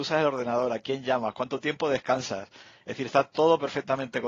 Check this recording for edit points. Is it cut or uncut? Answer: uncut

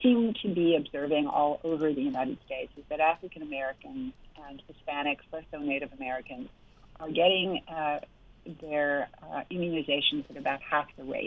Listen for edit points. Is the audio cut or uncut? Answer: uncut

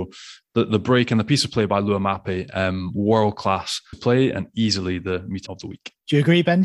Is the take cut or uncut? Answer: cut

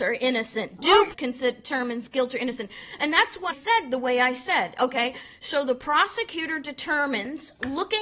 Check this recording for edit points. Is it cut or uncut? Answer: cut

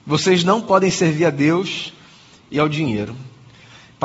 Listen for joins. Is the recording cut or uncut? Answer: uncut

